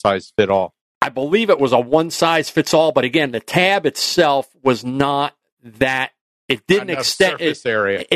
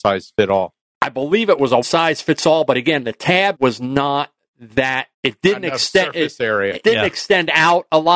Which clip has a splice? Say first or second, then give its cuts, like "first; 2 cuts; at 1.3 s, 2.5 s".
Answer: second; 4 cuts; at 1.8 s, 3.5 s, 5.1 s, 6.8 s